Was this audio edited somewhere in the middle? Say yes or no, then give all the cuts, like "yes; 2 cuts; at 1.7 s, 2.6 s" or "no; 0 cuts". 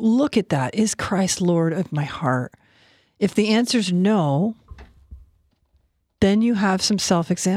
no; 0 cuts